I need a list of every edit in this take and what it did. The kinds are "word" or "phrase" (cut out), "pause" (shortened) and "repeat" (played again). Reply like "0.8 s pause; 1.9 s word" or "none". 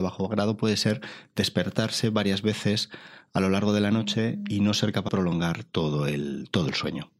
5.1 s word